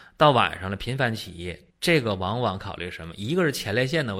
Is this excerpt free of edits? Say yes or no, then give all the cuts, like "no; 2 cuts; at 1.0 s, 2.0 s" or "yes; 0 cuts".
no; 1 cut; at 1.7 s